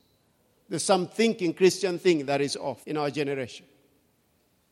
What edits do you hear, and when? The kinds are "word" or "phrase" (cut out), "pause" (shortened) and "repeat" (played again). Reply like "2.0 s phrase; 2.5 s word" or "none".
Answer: 2.8 s pause